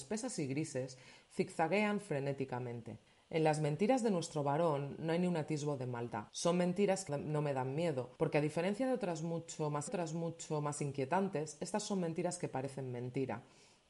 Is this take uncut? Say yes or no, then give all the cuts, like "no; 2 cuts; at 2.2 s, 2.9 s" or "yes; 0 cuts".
no; 5 cuts; at 3.1 s, 6.3 s, 7.1 s, 8.2 s, 9.9 s